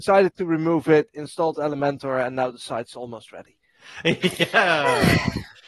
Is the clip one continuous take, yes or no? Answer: yes